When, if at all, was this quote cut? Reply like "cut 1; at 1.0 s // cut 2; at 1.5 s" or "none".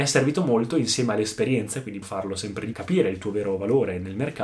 cut 1; at 2.0 s // cut 2; at 2.7 s